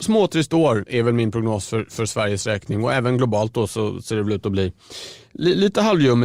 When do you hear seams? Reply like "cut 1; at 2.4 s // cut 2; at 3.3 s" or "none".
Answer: none